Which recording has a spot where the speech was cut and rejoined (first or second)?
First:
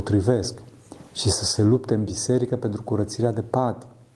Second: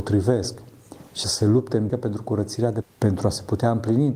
second